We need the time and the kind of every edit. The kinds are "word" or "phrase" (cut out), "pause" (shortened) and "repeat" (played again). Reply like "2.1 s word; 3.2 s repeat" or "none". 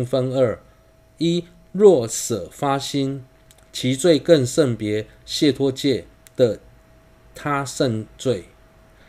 6.1 s pause

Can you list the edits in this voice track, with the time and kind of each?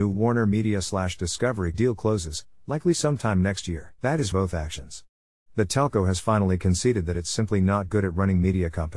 1.7 s phrase; 4.0 s pause; 4.3 s phrase

